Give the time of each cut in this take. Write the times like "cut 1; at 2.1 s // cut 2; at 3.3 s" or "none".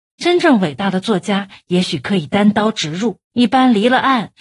cut 1; at 3.2 s